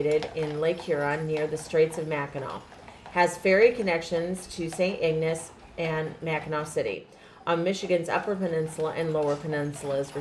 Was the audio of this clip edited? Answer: no; 0 cuts

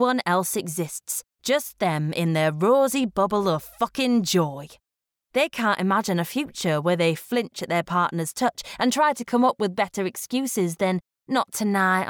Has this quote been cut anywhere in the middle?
no; 0 cuts

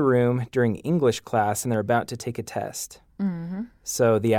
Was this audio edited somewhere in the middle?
no; 0 cuts

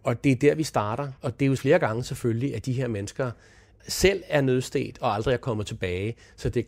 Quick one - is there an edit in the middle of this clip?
yes; 3 cuts; at 1.2 s, 1.6 s, 3.8 s

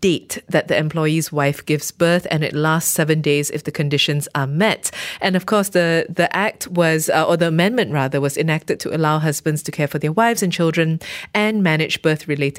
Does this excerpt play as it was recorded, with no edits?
yes; 0 cuts

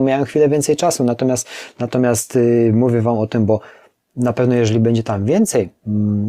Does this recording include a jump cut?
no; 0 cuts

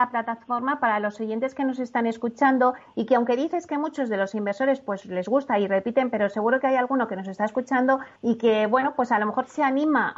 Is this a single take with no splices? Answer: no; 1 cut; at 8.2 s

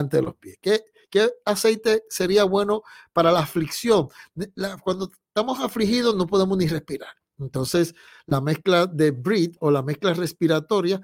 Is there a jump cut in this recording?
no; 0 cuts

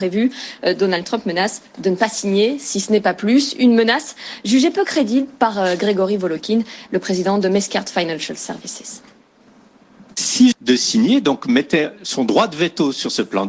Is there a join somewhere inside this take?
yes; 1 cut; at 10.5 s

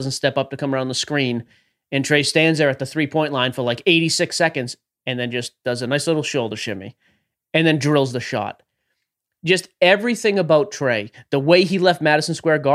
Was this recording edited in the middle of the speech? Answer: no; 0 cuts

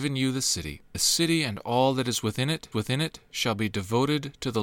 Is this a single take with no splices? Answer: no; 2 cuts; at 0.9 s, 2.7 s

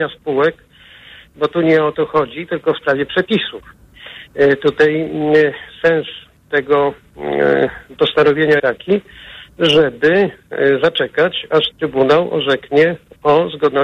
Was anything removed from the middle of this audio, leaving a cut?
yes; 1 cut; at 8.6 s

